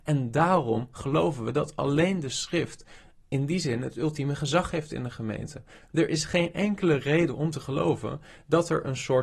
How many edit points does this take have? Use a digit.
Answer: 0